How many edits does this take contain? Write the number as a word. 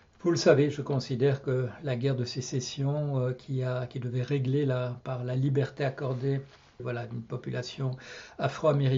two